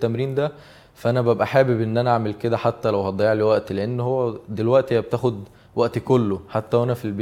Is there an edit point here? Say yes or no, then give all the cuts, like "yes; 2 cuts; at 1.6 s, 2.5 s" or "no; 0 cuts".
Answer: no; 0 cuts